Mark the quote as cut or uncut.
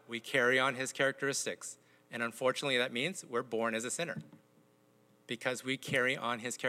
uncut